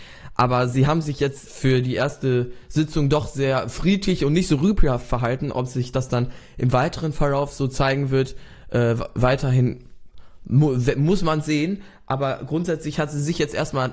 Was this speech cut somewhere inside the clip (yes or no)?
yes